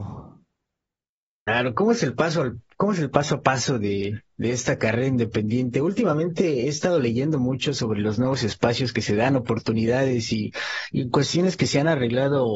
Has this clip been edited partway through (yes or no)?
no